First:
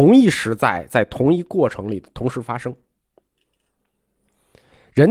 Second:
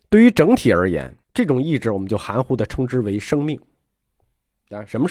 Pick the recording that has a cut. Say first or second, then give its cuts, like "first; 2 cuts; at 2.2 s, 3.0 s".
second; 1 cut; at 1.2 s